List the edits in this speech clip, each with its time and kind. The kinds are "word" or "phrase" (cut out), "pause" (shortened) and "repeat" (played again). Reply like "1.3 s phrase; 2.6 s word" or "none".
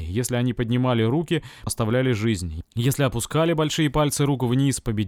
1.7 s word